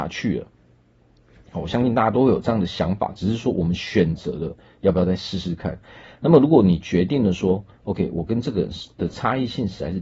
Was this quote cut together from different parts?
no; 0 cuts

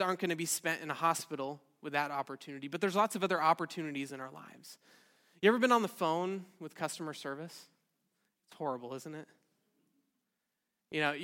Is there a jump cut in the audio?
no; 0 cuts

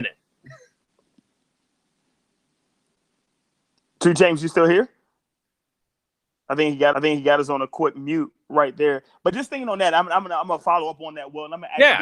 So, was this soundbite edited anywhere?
yes; 1 cut; at 6.9 s

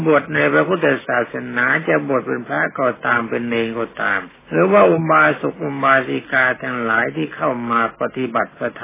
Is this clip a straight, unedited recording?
no; 1 cut; at 4.4 s

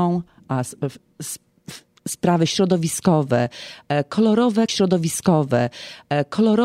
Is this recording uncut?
no; 1 cut; at 4.7 s

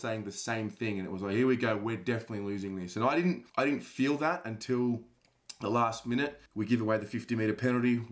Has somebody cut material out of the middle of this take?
yes; 2 cuts; at 3.5 s, 6.5 s

